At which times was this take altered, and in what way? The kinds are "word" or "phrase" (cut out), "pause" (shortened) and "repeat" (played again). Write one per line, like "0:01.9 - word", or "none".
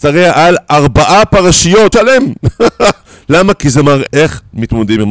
0:01.9 - word
0:04.1 - phrase